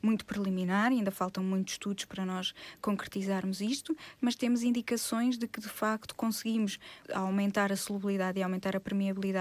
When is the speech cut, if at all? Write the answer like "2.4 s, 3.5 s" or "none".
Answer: none